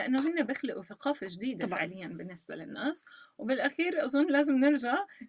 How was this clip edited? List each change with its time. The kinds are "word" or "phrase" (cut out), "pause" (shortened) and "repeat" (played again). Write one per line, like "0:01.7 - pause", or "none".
none